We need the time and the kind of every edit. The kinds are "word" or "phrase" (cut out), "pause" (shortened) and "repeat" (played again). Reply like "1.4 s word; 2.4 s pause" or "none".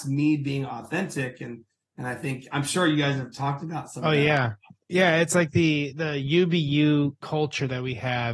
none